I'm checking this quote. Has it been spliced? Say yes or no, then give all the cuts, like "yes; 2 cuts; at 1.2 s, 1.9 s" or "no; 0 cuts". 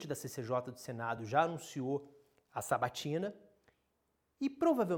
no; 0 cuts